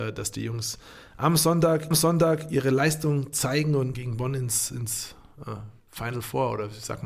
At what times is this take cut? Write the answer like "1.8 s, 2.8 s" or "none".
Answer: 1.9 s, 3.9 s, 5.8 s